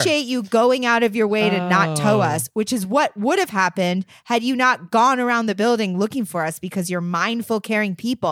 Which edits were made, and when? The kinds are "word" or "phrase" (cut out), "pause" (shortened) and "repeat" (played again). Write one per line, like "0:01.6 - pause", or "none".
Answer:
none